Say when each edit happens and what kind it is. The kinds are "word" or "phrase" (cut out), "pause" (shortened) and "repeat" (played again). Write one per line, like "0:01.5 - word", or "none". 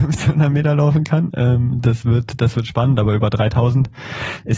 none